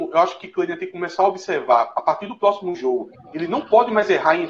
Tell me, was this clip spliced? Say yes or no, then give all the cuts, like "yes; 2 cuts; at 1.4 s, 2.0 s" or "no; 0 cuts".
no; 0 cuts